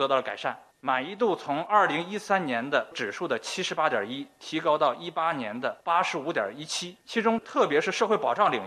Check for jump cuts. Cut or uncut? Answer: cut